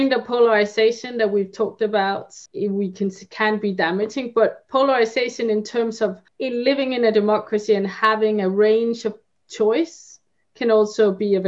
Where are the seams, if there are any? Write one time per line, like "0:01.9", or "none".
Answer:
0:02.5
0:06.3